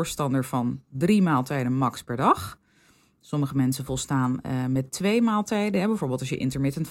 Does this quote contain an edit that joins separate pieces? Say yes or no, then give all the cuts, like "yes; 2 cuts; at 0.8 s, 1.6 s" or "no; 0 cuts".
no; 0 cuts